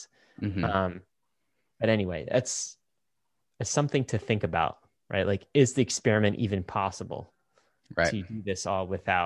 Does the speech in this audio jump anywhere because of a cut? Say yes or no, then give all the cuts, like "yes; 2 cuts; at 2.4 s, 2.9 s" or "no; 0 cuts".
no; 0 cuts